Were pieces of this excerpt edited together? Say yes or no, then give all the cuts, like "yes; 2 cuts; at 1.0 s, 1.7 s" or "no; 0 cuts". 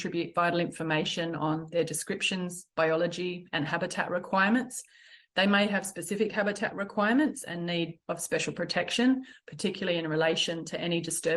no; 0 cuts